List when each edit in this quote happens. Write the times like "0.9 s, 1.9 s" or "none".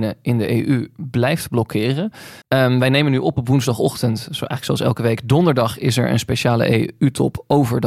2.4 s